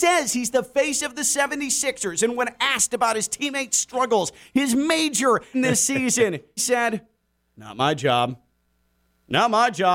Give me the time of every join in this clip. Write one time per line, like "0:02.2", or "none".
0:05.5
0:06.6